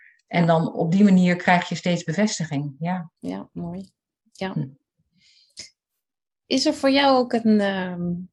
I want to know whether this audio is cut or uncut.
cut